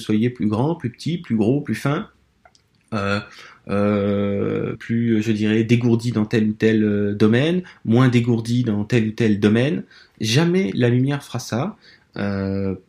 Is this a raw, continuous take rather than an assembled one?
no; 1 cut; at 4.7 s

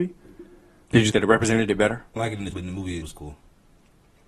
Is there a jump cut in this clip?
yes; 4 cuts; at 1.1 s, 2.2 s, 2.5 s, 3.0 s

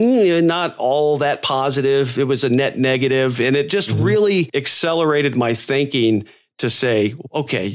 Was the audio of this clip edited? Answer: no; 0 cuts

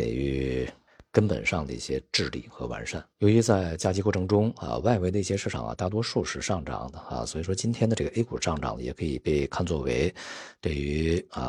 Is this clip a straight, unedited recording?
no; 1 cut; at 3.1 s

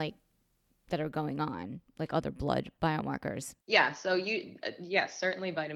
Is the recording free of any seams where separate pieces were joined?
no; 1 cut; at 3.6 s

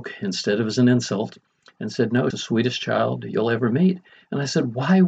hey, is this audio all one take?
no; 1 cut; at 2.3 s

